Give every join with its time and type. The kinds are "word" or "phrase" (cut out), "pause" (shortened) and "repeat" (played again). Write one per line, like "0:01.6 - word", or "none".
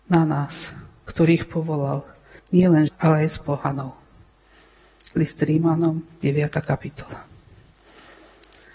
0:02.4 - pause
0:02.9 - word